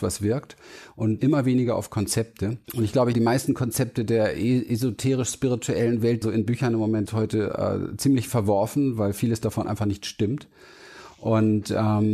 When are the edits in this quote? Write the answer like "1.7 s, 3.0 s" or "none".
1.2 s, 2.6 s, 3.1 s, 6.2 s, 7.1 s